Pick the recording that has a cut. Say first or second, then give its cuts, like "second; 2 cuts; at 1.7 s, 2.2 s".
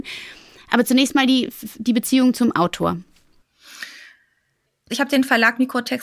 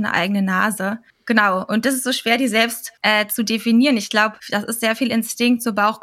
second; 3 cuts; at 1.1 s, 3.0 s, 4.4 s